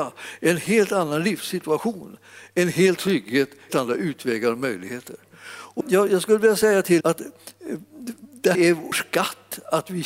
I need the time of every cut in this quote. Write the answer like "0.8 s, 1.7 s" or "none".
3.0 s, 3.7 s, 5.8 s, 7.0 s, 8.5 s, 8.9 s